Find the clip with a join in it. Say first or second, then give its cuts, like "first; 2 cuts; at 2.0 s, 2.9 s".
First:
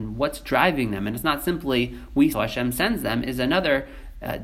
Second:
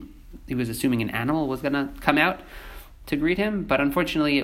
first; 1 cut; at 2.3 s